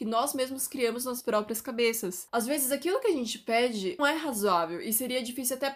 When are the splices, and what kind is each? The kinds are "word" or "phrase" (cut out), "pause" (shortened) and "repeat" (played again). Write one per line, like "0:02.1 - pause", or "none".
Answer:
0:01.2 - word
0:04.0 - word